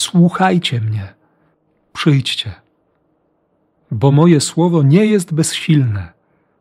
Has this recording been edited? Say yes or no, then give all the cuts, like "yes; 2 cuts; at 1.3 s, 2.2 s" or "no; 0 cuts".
no; 0 cuts